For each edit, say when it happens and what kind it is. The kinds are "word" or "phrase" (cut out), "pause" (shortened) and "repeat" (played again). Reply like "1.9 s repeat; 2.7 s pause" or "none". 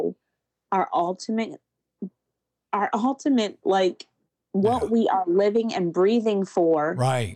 none